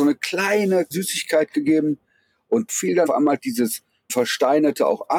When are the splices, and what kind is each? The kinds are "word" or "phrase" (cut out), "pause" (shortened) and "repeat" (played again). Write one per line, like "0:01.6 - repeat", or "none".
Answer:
0:00.9 - word
0:02.7 - word
0:03.1 - word
0:03.4 - word
0:04.1 - word